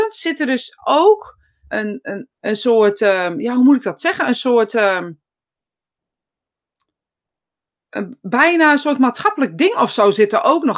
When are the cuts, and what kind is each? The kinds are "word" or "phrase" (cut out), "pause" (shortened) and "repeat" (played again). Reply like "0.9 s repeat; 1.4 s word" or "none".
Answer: 1.7 s word; 2.3 s word

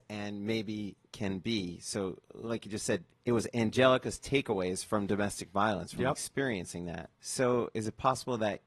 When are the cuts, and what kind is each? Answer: 1.0 s pause; 3.1 s pause; 7.1 s pause

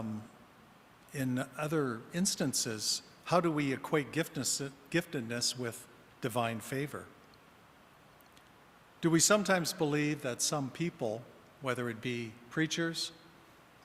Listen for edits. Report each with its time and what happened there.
none

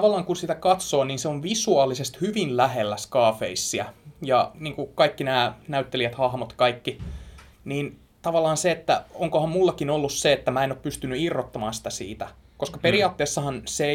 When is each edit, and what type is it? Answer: none

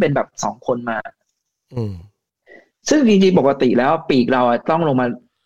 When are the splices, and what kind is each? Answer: 2.4 s pause

